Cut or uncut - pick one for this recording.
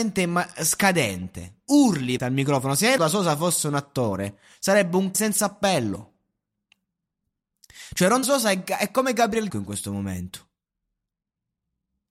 cut